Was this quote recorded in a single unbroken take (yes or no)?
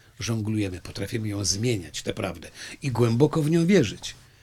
yes